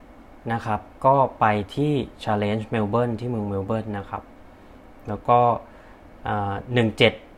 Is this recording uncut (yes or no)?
yes